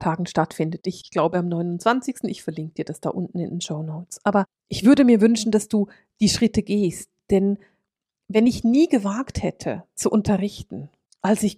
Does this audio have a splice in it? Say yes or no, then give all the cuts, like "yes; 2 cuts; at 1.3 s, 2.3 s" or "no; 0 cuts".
no; 0 cuts